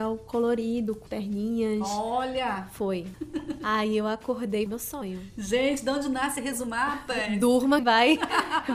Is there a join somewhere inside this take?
yes; 3 cuts; at 1.1 s, 4.7 s, 7.8 s

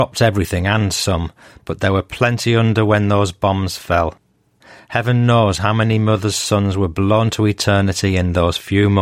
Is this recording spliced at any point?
no; 0 cuts

